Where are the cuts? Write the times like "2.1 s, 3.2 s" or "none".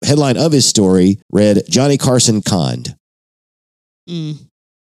1.2 s, 2.4 s